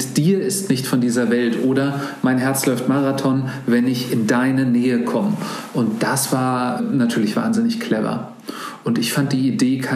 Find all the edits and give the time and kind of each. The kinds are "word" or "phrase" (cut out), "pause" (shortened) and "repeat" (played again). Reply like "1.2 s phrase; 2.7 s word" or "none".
6.8 s word

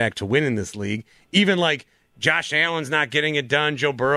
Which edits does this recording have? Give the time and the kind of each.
none

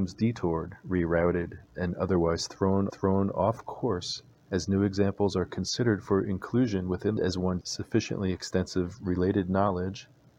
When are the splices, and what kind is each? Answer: 2.9 s repeat; 4.3 s pause; 7.2 s phrase; 7.6 s word

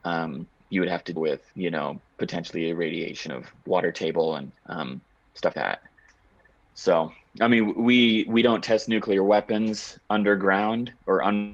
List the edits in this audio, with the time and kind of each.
1.2 s word; 1.5 s pause; 2.1 s pause; 4.6 s pause; 5.5 s word

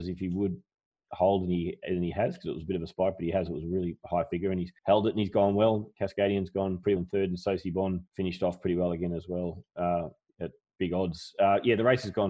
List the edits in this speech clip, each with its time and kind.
4.8 s pause; 7.0 s word; 8.1 s pause

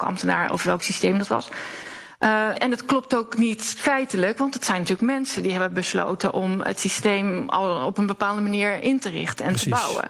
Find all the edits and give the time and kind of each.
2.5 s word

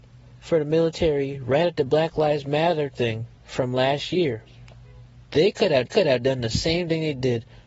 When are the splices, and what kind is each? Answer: 3.3 s pause; 5.9 s repeat

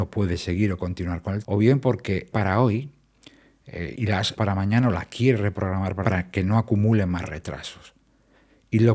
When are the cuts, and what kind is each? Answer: 1.4 s word; 2.3 s phrase; 3.9 s word; 4.4 s word; 6.0 s word

